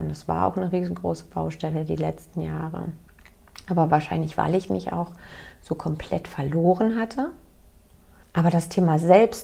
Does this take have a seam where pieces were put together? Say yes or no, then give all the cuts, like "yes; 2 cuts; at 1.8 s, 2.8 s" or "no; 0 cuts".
no; 0 cuts